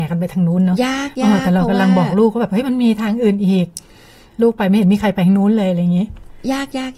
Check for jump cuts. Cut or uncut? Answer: uncut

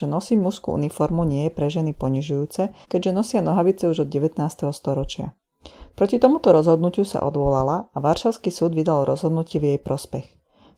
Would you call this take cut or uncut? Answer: cut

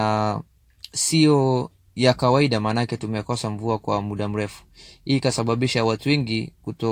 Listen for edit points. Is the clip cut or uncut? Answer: uncut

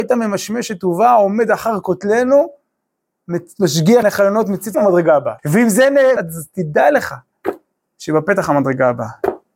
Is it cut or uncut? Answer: cut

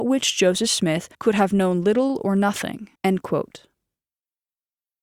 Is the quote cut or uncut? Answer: cut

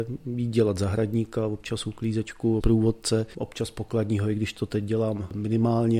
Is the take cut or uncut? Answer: cut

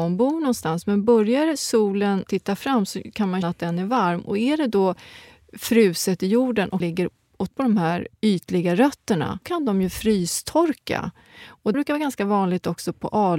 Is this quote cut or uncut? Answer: cut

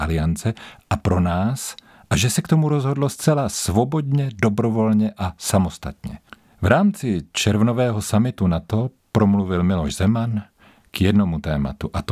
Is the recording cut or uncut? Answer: uncut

